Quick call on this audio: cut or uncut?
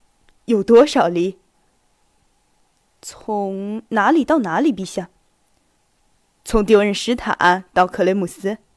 uncut